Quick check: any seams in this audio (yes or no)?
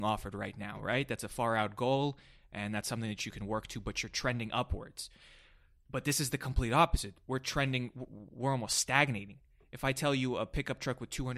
no